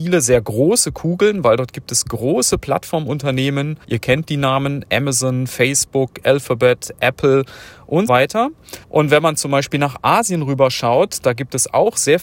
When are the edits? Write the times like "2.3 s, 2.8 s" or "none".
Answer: 3.8 s, 8.1 s, 8.8 s